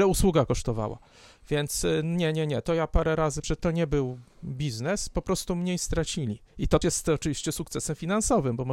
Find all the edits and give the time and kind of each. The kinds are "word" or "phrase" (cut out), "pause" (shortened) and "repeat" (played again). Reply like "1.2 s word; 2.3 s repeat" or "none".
3.4 s word; 6.8 s word